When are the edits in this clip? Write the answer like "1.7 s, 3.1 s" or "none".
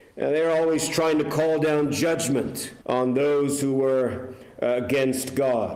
2.8 s